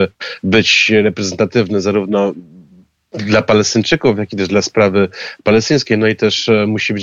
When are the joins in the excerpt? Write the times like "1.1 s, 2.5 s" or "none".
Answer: none